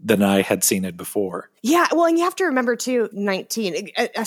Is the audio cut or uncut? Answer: cut